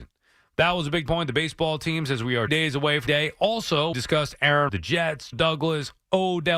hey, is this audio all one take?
no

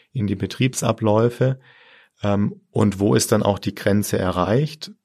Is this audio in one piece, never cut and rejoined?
yes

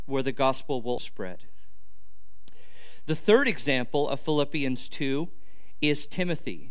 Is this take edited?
yes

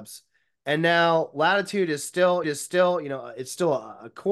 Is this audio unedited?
no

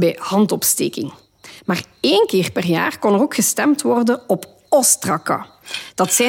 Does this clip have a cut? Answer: no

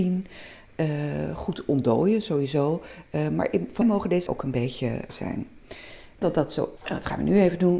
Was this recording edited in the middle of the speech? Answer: yes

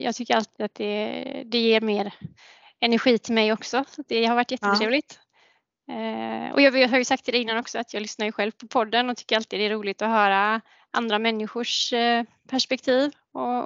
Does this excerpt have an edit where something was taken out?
no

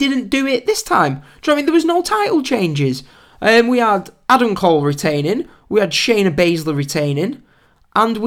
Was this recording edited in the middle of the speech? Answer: no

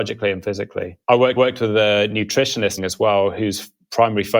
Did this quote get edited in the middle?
yes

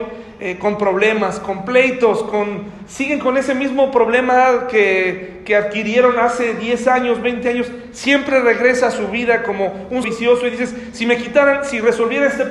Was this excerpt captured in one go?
no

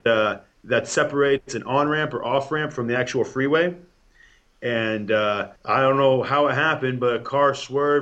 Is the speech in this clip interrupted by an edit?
yes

